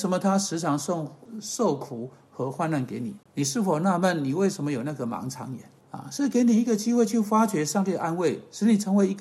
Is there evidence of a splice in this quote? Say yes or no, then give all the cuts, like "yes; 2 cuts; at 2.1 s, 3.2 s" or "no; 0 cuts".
yes; 2 cuts; at 3.2 s, 5.8 s